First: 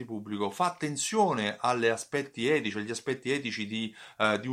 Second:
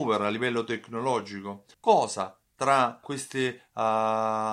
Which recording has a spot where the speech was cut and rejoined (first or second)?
second